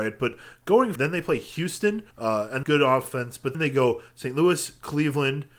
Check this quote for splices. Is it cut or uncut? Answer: cut